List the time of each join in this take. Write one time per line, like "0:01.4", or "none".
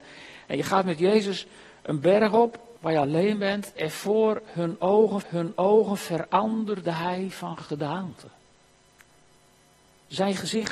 0:02.8
0:05.2